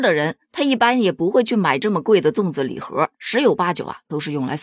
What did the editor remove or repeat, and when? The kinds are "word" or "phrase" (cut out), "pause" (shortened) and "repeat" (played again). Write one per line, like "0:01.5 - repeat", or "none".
0:03.1 - pause